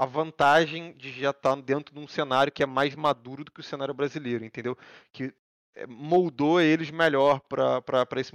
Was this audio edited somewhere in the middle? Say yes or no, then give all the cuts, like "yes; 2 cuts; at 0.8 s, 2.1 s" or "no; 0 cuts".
no; 0 cuts